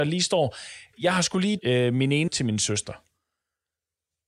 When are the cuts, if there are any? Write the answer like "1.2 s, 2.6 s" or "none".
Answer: 0.9 s, 1.6 s, 2.3 s